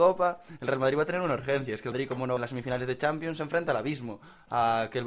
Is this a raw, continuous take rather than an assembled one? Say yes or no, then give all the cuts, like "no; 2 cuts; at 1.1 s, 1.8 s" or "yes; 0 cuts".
no; 2 cuts; at 1.9 s, 2.4 s